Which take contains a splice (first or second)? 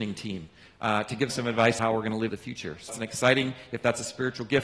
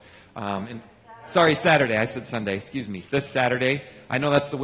first